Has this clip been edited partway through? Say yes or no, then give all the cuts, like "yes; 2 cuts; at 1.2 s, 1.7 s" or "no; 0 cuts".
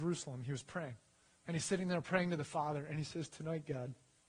no; 0 cuts